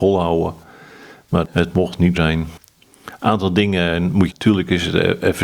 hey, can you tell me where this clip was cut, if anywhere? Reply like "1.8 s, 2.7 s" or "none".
2.1 s, 4.3 s